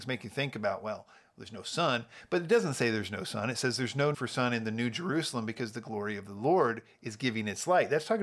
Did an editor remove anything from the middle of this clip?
yes; 1 cut; at 4.1 s

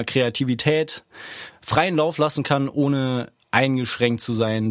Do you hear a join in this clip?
no; 0 cuts

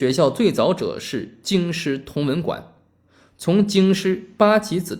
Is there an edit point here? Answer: no; 0 cuts

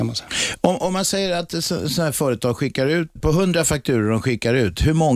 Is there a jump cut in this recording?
yes; 1 cut; at 3.2 s

